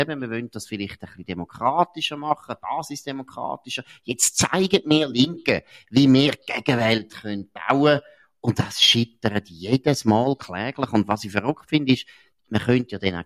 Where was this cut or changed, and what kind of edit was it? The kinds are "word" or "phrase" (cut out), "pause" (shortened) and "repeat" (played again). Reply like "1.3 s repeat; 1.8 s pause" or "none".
none